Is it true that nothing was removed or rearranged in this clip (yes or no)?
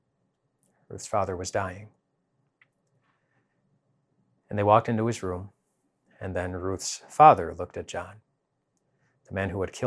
yes